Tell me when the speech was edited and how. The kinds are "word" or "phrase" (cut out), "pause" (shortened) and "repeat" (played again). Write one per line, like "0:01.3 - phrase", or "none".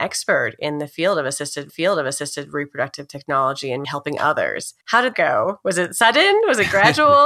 0:01.7 - repeat
0:03.8 - word
0:04.8 - pause
0:05.1 - word